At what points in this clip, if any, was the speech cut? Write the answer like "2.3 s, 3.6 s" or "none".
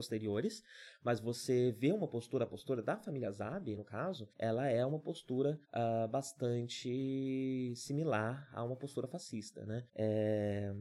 3.8 s, 4.3 s, 5.6 s, 9.9 s